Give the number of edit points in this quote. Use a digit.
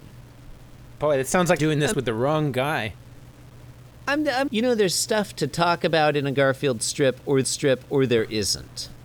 4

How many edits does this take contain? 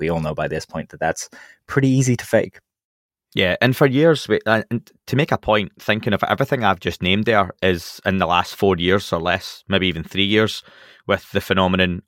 0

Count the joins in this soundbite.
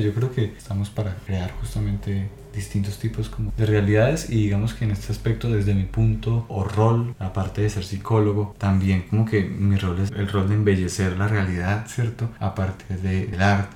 3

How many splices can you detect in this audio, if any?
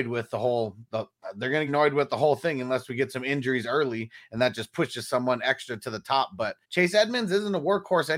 2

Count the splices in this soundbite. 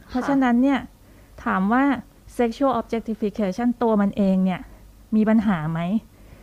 0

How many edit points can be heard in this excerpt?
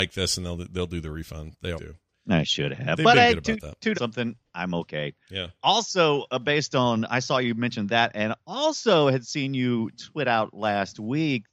3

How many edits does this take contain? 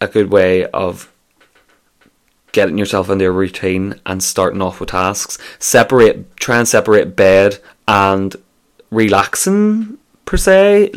1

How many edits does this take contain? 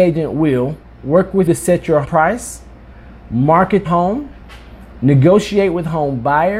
3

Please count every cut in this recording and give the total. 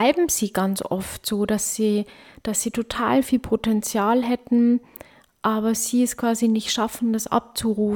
0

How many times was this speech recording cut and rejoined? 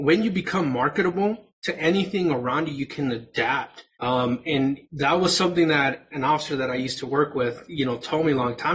3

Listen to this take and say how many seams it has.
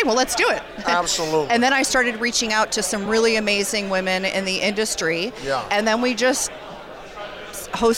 0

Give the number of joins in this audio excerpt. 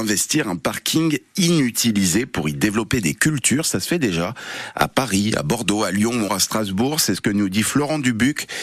1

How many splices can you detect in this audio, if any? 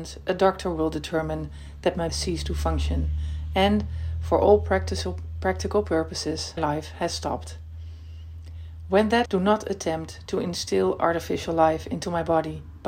3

